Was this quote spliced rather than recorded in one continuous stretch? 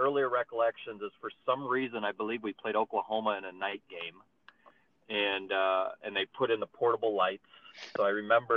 no; 0 cuts

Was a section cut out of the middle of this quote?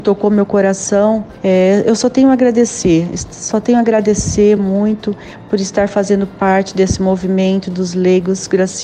no; 0 cuts

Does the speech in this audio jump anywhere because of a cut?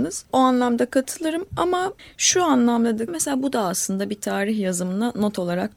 yes; 2 cuts; at 2.0 s, 3.1 s

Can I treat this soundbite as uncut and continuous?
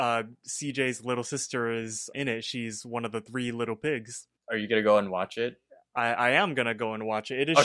no; 2 cuts; at 2.1 s, 4.4 s

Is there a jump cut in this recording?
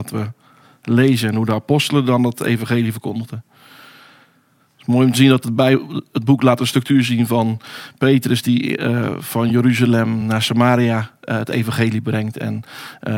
no; 0 cuts

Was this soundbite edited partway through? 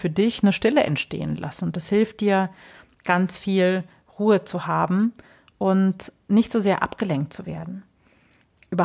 no; 0 cuts

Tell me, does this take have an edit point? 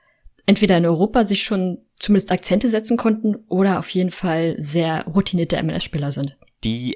no; 0 cuts

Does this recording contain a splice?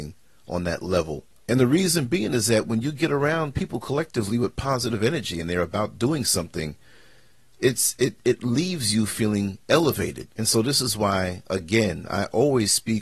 yes; 2 cuts; at 1.3 s, 10.3 s

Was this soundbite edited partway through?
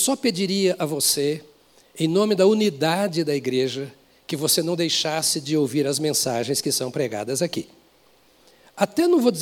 no; 0 cuts

